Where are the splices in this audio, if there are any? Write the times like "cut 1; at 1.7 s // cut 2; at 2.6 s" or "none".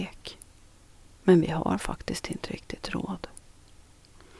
none